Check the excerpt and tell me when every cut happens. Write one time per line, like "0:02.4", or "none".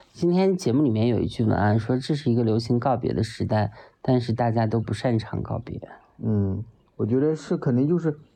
none